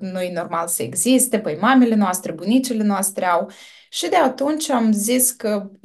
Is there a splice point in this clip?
no; 0 cuts

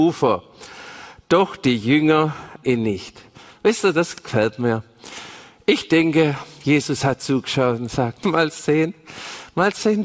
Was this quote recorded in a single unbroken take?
no; 2 cuts; at 2.6 s, 8.2 s

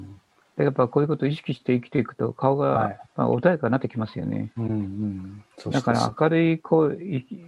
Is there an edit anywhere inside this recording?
yes; 1 cut; at 3.1 s

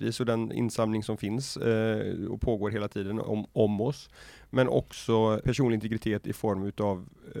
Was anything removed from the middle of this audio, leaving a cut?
yes; 2 cuts; at 3.2 s, 5.4 s

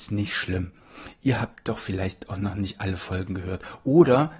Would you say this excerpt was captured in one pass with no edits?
yes; 0 cuts

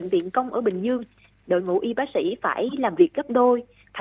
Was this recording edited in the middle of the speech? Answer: no; 0 cuts

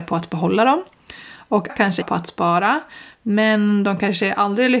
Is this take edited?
yes; 2 cuts; at 1.7 s, 2.0 s

